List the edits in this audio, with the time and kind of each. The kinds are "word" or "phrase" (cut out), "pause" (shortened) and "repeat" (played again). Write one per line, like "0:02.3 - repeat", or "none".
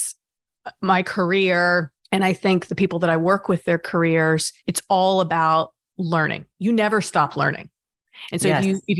0:02.0 - pause
0:04.6 - pause
0:06.5 - pause